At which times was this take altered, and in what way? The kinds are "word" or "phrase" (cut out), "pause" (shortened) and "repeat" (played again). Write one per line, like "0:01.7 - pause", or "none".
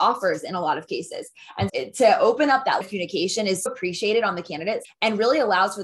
0:01.7 - word
0:02.8 - word
0:03.7 - word
0:04.8 - word